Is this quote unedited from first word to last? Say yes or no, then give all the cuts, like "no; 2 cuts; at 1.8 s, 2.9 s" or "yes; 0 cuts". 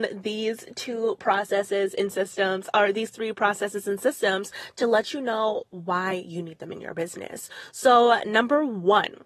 yes; 0 cuts